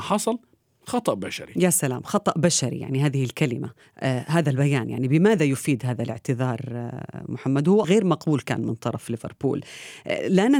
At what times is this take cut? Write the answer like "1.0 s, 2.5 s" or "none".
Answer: 3.8 s, 7.8 s